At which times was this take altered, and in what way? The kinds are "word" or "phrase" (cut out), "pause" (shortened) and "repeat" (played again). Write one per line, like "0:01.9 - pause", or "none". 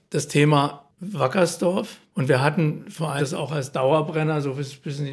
0:03.2 - word